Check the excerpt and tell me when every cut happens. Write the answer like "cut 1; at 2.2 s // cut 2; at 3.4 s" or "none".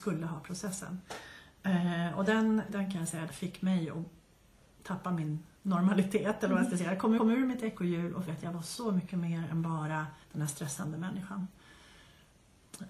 cut 1; at 2.7 s // cut 2; at 3.3 s // cut 3; at 5.6 s // cut 4; at 7.2 s // cut 5; at 8.3 s // cut 6; at 10.2 s